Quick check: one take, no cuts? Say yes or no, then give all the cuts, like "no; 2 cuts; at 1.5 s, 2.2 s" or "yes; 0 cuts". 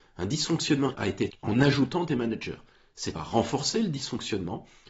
no; 3 cuts; at 0.9 s, 1.3 s, 3.1 s